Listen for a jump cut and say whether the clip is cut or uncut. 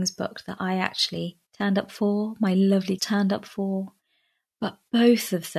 cut